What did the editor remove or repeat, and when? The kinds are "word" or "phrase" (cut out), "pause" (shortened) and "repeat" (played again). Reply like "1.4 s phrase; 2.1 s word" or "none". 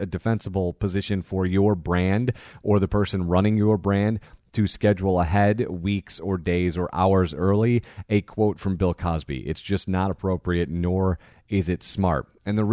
none